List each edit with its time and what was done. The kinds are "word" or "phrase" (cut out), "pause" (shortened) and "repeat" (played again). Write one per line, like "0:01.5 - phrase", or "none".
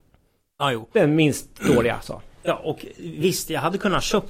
none